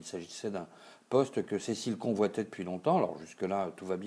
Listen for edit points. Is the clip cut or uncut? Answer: uncut